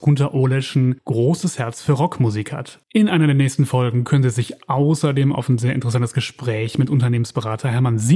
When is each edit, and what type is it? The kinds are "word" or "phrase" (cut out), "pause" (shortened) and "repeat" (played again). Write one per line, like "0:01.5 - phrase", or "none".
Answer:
0:01.0 - pause
0:02.8 - pause